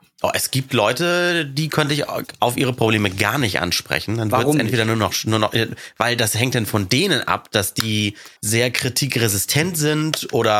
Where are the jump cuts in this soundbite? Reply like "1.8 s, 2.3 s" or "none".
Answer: 8.4 s